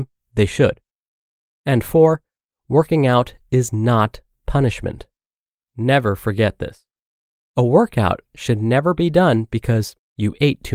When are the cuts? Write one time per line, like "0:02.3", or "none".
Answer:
none